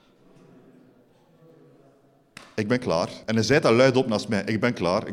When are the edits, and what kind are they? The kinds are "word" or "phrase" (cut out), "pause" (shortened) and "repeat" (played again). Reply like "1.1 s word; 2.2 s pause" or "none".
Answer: 3.2 s pause